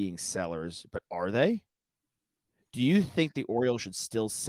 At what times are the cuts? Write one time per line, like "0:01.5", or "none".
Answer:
none